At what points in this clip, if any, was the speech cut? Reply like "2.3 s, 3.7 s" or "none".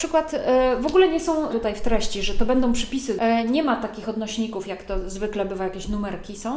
1.5 s